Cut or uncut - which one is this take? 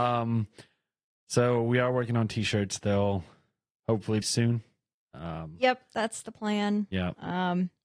cut